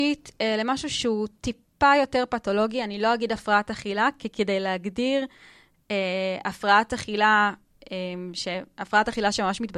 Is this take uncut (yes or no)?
yes